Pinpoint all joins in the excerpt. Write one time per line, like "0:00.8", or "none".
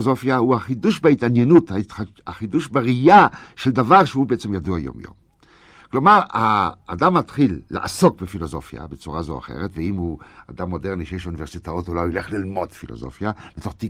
none